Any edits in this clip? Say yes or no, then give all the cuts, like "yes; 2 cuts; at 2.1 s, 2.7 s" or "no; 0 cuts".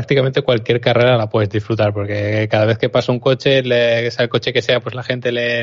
no; 0 cuts